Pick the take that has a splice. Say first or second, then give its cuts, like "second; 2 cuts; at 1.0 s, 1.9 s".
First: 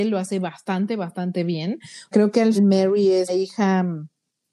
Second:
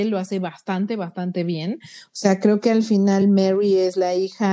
first; 3 cuts; at 2.1 s, 2.6 s, 3.3 s